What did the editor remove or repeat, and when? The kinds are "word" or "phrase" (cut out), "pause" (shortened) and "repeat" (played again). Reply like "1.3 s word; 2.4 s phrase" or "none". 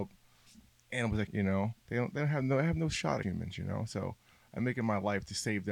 1.3 s phrase; 1.8 s pause; 3.2 s word